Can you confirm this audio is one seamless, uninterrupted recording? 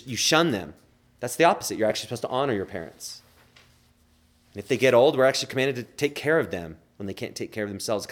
yes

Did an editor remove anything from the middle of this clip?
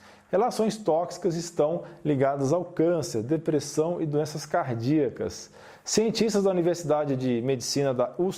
no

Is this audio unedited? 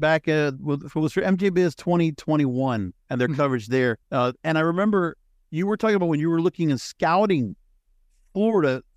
no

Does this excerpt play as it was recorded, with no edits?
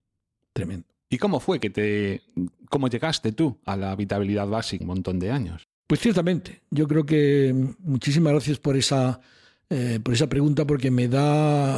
no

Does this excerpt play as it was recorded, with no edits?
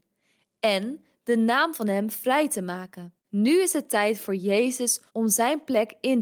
no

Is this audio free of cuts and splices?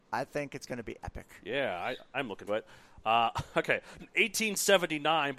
no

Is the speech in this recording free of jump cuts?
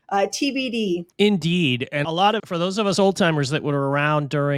no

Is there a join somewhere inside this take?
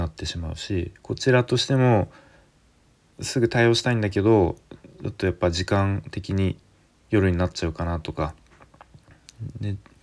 no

